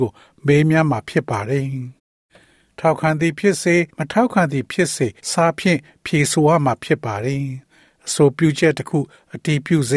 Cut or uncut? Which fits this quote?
cut